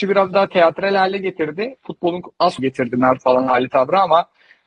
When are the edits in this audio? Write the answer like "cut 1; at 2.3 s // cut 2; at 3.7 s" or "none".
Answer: cut 1; at 2.6 s // cut 2; at 3.2 s